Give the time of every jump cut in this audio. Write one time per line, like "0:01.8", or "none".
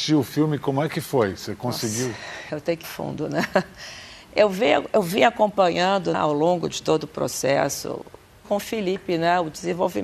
0:02.8
0:06.1
0:08.4